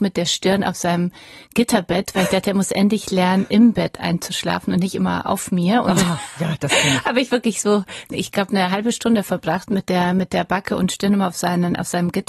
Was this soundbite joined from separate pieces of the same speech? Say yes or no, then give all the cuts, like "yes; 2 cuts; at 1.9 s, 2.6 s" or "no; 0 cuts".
no; 0 cuts